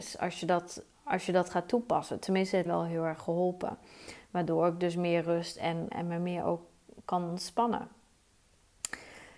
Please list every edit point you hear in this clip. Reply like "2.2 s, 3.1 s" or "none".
2.7 s, 5.9 s